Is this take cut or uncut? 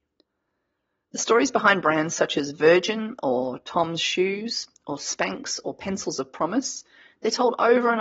uncut